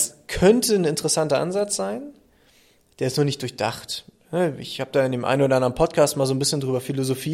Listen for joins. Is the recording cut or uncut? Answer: uncut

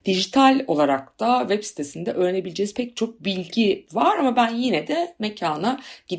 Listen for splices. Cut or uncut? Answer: uncut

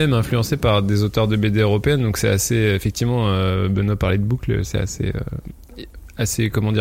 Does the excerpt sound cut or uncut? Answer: uncut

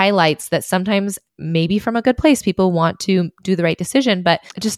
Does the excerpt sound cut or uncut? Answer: cut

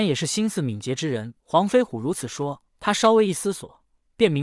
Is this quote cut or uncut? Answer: cut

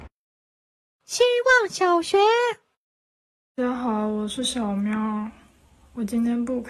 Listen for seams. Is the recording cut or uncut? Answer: uncut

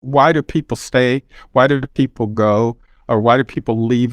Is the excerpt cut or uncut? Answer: uncut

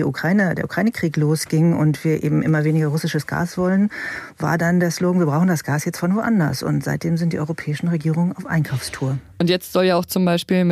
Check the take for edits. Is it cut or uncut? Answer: uncut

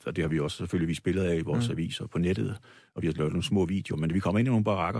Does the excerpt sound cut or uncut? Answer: uncut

